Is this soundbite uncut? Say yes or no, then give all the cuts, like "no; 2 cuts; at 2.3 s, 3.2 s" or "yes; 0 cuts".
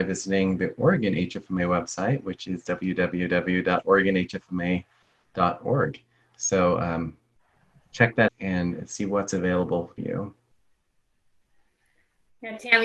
no; 2 cuts; at 8.3 s, 10.0 s